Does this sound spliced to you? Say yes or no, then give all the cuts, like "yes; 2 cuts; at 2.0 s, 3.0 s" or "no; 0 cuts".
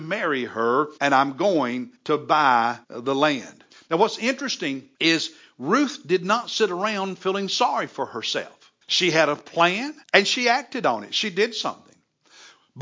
yes; 7 cuts; at 1.0 s, 2.0 s, 2.8 s, 3.7 s, 4.9 s, 8.8 s, 10.0 s